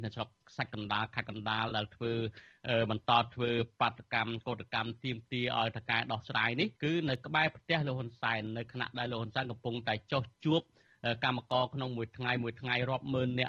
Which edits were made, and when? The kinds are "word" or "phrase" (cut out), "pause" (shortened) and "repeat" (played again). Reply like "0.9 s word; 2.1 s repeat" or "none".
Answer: 6.7 s pause